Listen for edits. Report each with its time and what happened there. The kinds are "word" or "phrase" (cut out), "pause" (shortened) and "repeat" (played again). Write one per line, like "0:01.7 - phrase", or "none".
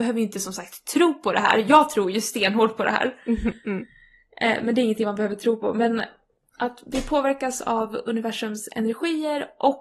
none